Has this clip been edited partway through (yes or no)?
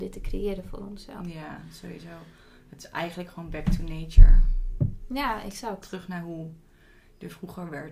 no